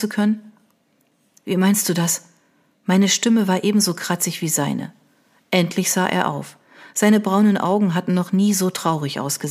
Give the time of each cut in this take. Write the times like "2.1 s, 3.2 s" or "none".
none